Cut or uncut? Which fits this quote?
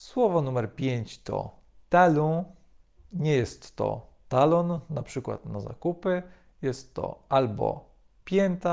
uncut